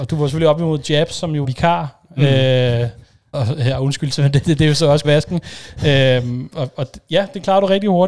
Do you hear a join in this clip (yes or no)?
yes